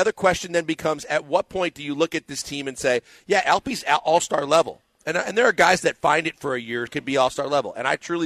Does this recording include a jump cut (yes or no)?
yes